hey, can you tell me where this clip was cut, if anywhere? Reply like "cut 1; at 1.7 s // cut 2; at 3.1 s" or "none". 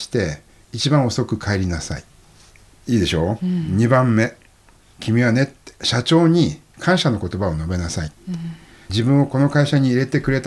none